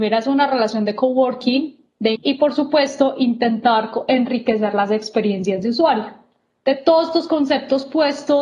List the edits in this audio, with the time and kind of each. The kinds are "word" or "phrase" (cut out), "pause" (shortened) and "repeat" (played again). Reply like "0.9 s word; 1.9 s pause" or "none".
2.1 s phrase